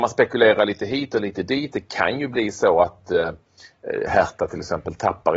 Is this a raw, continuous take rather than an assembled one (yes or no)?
yes